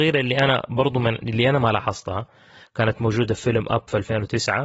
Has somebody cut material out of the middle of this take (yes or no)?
no